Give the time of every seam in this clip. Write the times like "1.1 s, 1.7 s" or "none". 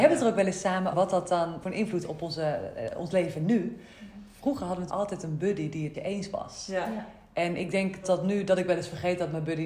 0.9 s, 1.6 s, 2.0 s, 4.9 s, 5.9 s, 8.0 s